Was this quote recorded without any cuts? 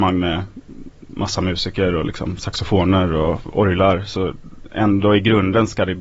yes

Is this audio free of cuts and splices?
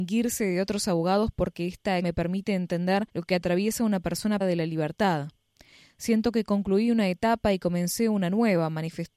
no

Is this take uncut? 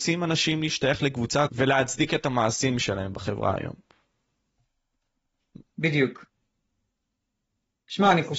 no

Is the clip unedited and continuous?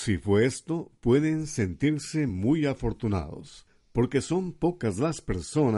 yes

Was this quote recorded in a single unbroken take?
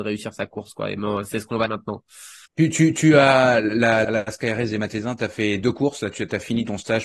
no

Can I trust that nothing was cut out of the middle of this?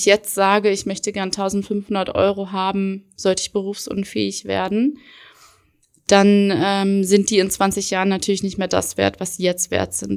yes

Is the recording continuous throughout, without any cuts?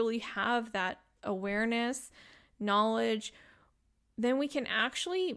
yes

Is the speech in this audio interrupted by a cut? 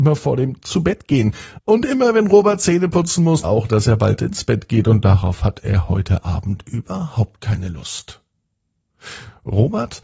yes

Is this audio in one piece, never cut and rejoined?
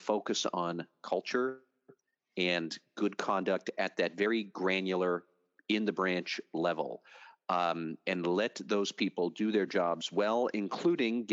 yes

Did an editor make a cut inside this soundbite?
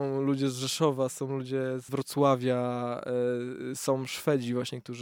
yes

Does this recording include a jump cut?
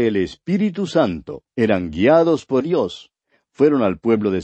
yes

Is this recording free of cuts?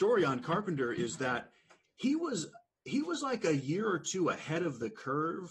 yes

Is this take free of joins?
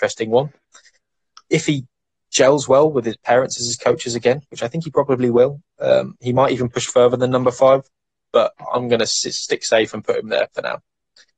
yes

